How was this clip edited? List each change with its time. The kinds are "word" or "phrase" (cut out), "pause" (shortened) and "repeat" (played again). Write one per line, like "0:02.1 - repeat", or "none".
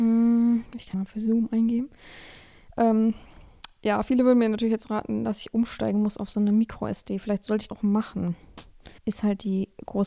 0:00.9 - word
0:07.7 - word
0:09.0 - pause